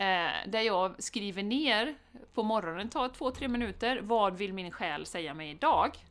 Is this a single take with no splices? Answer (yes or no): yes